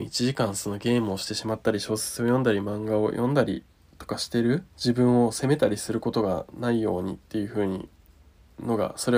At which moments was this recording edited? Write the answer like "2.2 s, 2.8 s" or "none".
4.7 s